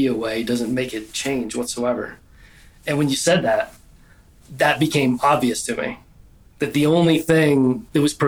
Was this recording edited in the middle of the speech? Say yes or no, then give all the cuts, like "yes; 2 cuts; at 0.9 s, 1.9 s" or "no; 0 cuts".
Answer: no; 0 cuts